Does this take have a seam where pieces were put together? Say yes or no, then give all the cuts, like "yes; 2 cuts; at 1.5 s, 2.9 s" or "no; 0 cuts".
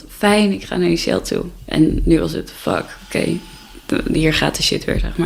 no; 0 cuts